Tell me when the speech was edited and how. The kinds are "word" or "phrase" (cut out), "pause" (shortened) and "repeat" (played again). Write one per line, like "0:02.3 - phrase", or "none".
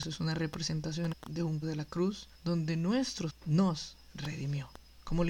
0:01.1 - word
0:01.6 - word
0:02.3 - pause
0:03.3 - word